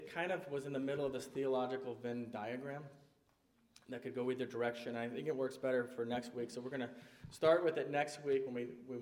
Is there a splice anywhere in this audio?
no; 0 cuts

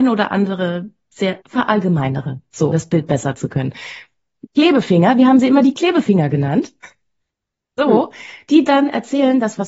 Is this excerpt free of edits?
no; 4 cuts; at 1.4 s, 2.7 s, 3.4 s, 8.7 s

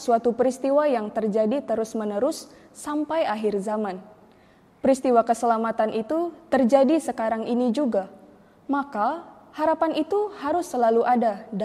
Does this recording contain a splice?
no; 0 cuts

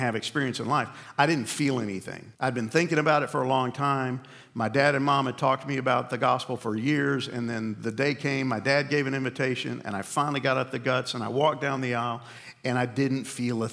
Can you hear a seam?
yes; 1 cut; at 2.3 s

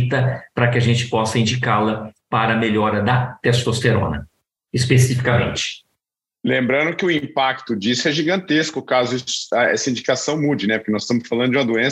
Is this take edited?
no; 0 cuts

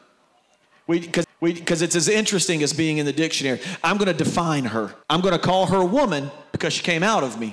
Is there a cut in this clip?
yes; 2 cuts; at 1.2 s, 5.0 s

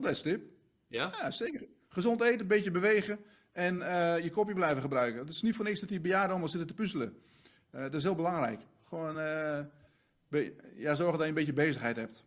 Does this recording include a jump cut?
no; 0 cuts

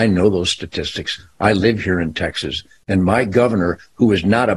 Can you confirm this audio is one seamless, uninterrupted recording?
yes; 0 cuts

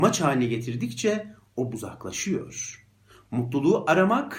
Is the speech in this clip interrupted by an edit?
yes; 1 cut; at 1.7 s

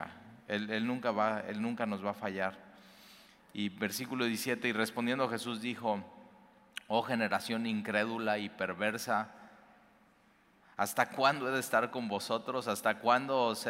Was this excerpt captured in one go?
yes; 0 cuts

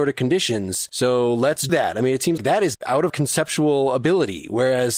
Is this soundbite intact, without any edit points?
no; 4 cuts; at 1.7 s, 2.4 s, 2.7 s, 3.1 s

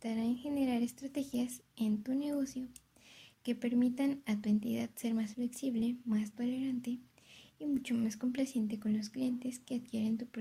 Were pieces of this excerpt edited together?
no; 0 cuts

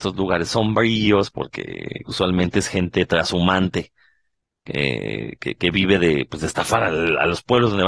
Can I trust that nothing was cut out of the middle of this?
yes; 0 cuts

